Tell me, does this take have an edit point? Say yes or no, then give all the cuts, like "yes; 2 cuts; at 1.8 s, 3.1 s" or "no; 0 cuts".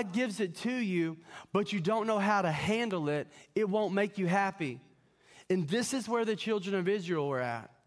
no; 0 cuts